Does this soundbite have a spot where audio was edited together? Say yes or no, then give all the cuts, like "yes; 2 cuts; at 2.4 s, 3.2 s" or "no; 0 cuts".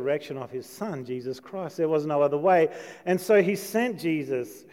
no; 0 cuts